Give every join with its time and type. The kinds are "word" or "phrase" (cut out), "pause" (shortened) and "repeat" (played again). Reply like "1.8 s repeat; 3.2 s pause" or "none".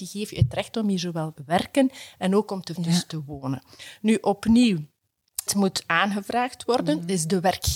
1.4 s word; 2.8 s word; 5.5 s word